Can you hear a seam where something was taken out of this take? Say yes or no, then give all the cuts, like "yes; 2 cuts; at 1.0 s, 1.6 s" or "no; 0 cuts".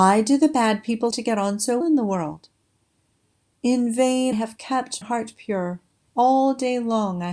yes; 4 cuts; at 1.1 s, 1.8 s, 4.3 s, 5.0 s